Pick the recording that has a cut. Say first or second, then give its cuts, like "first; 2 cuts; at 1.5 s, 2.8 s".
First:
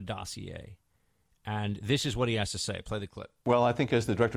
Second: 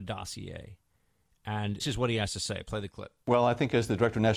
second; 1 cut; at 1.8 s